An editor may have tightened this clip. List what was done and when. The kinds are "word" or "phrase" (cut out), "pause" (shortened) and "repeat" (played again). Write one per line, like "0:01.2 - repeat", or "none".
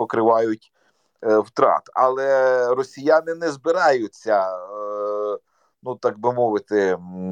none